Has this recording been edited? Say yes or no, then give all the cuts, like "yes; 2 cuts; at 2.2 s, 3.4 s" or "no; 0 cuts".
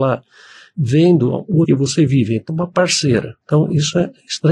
yes; 3 cuts; at 1.6 s, 2.5 s, 3.4 s